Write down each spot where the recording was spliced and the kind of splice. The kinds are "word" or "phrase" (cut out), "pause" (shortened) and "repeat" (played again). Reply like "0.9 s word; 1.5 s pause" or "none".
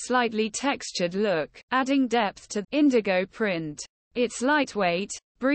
1.6 s pause; 2.6 s word